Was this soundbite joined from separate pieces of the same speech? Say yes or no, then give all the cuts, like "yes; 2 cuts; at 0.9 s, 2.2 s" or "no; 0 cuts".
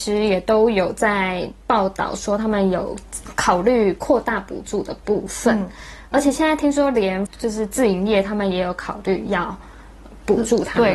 yes; 1 cut; at 7.3 s